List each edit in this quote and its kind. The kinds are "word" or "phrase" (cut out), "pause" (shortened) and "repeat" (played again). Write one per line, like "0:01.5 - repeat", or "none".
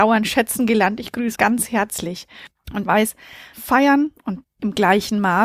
0:01.3 - word
0:02.8 - word
0:03.5 - word
0:04.4 - word

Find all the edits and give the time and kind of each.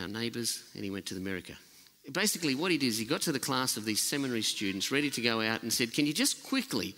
none

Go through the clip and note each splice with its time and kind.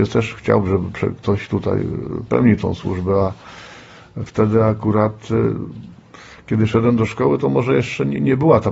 0:04.3 - word

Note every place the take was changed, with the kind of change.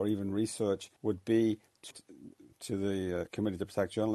0:01.0 - pause
0:01.9 - word

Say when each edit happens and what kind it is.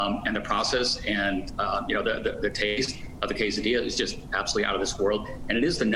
none

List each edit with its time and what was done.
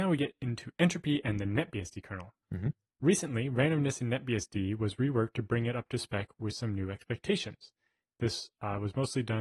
0:02.4 - pause

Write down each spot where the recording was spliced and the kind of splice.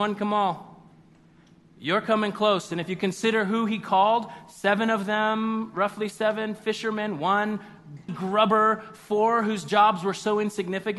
0:08.1 - word

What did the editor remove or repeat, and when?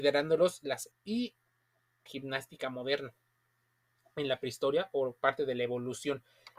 0:00.9 - word
0:02.1 - phrase

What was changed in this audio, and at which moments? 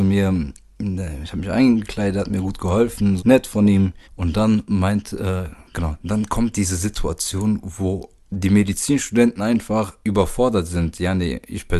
0:03.2 - word
0:04.0 - pause
0:10.0 - pause

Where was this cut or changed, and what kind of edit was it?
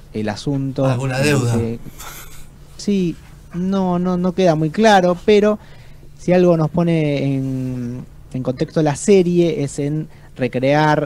none

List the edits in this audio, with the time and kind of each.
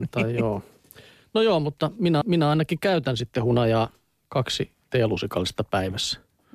0:02.2 - repeat

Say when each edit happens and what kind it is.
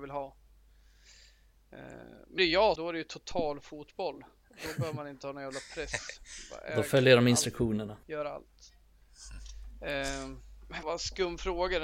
0:02.4 - phrase
0:02.8 - phrase
0:08.0 - pause
0:10.8 - word

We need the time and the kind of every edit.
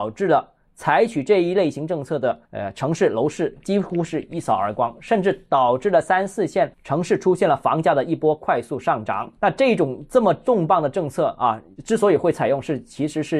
0:02.4 - pause
0:06.7 - pause
0:09.4 - pause

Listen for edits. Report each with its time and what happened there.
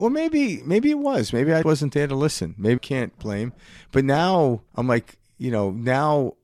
0:01.6 - word
0:02.8 - phrase
0:04.7 - pause

